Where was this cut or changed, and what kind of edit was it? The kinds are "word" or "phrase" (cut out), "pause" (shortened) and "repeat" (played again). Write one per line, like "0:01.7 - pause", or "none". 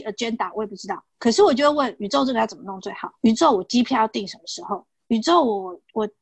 0:01.1 - pause
0:03.2 - pause